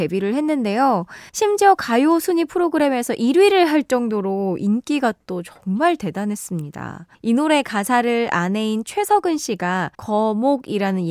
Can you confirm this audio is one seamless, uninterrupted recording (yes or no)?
no